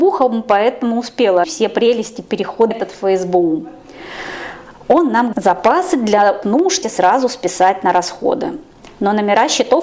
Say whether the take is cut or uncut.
cut